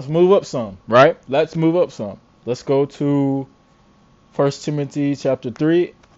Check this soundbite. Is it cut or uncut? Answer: cut